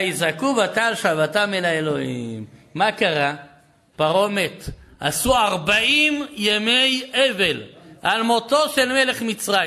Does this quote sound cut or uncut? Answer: uncut